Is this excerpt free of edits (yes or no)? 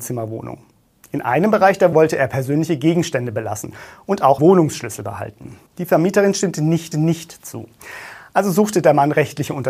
no